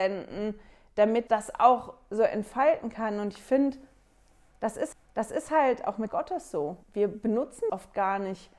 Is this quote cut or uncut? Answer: cut